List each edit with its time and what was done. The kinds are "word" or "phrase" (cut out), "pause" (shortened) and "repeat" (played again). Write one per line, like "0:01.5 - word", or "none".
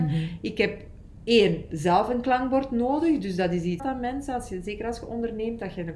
0:03.8 - phrase